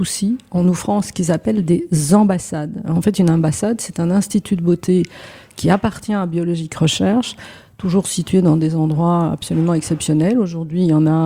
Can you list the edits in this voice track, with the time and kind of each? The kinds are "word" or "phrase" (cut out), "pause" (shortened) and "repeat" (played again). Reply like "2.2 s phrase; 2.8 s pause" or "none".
none